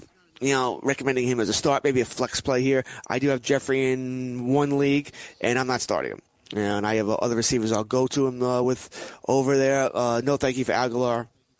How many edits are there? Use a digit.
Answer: 0